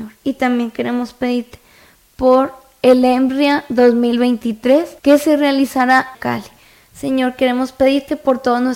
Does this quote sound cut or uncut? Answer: cut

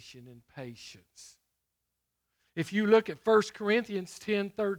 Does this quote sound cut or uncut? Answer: uncut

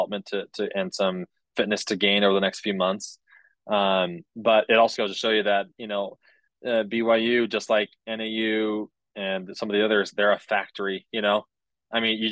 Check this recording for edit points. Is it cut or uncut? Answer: cut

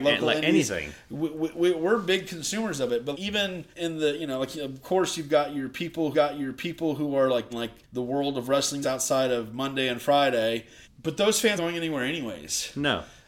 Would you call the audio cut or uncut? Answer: cut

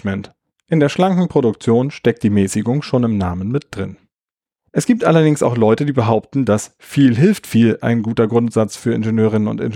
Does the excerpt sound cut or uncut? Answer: uncut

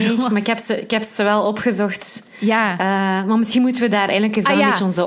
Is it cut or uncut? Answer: cut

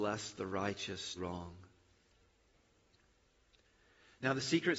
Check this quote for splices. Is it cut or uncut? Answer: cut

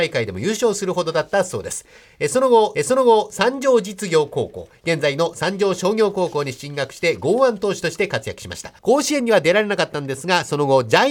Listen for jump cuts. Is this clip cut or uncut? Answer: cut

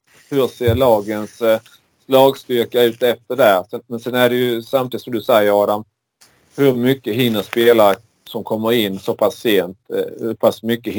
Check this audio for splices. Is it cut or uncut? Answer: uncut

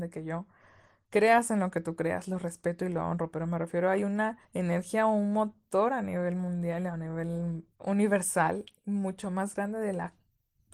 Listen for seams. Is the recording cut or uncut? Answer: cut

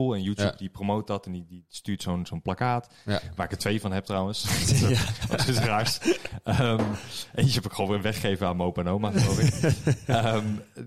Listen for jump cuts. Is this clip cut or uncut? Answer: uncut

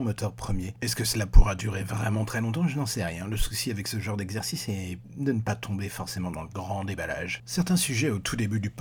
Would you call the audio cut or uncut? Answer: uncut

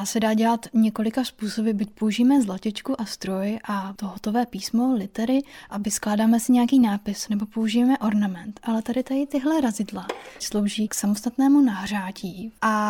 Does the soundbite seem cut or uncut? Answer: uncut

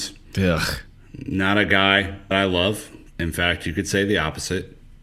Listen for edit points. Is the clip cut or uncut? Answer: cut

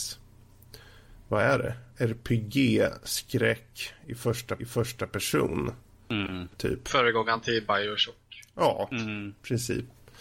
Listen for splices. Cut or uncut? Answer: cut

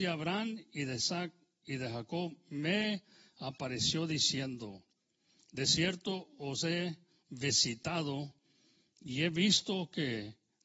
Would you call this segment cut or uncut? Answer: uncut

